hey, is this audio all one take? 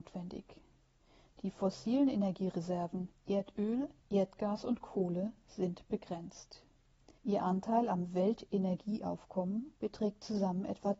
no; 3 cuts; at 4.0 s, 7.2 s, 9.8 s

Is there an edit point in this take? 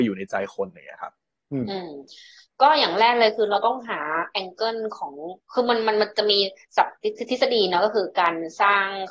no; 0 cuts

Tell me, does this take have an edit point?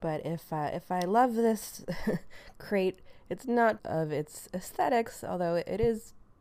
yes; 1 cut; at 3.8 s

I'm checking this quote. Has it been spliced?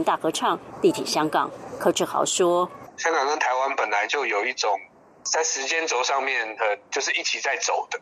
no; 0 cuts

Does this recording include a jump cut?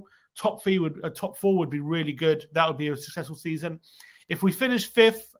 no; 0 cuts

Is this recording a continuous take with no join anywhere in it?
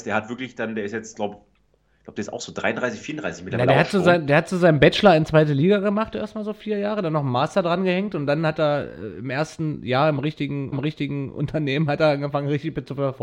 no; 1 cut; at 10.7 s

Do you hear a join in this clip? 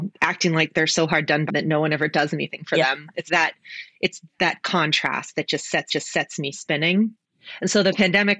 yes; 3 cuts; at 1.5 s, 3.3 s, 5.9 s

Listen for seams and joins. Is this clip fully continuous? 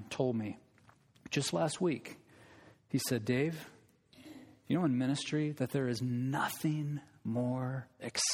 yes; 0 cuts

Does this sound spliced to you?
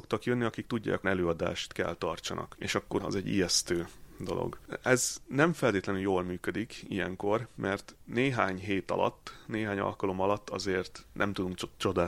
yes; 2 cuts; at 1.0 s, 3.0 s

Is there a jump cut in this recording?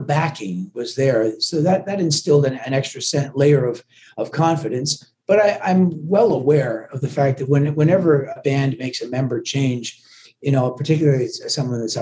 no; 0 cuts

